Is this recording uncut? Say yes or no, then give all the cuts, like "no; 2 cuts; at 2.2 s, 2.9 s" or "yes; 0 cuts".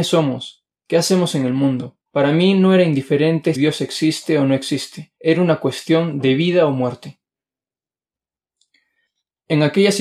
no; 3 cuts; at 2.1 s, 3.5 s, 5.2 s